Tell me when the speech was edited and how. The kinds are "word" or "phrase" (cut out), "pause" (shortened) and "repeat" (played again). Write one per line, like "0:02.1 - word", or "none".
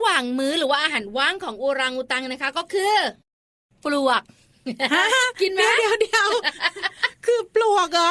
none